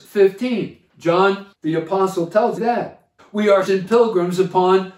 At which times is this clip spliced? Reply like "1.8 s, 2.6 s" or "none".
1.5 s, 2.6 s, 3.2 s, 3.7 s

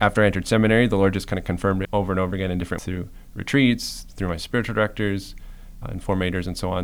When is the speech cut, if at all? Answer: 1.8 s, 2.8 s, 5.8 s

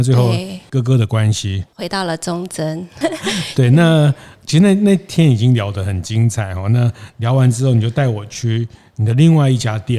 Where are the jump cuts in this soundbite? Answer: 3.0 s

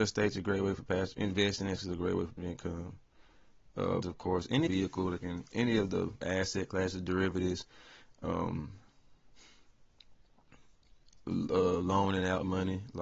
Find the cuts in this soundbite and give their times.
1.1 s, 1.8 s, 2.4 s, 4.0 s, 4.7 s, 5.2 s, 5.5 s, 6.2 s

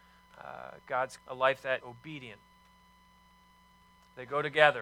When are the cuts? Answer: 1.2 s, 1.8 s

